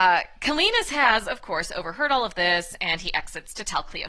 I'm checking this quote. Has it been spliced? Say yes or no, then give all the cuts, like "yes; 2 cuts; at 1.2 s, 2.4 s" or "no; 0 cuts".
no; 0 cuts